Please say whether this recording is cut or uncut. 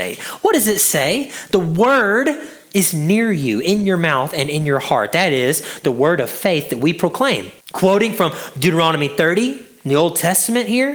cut